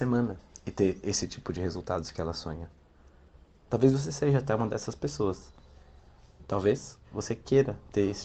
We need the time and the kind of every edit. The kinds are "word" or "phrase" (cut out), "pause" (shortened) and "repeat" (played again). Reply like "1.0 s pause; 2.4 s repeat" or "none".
none